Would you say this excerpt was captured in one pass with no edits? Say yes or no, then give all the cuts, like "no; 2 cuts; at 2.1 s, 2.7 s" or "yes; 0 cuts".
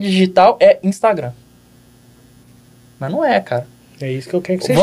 yes; 0 cuts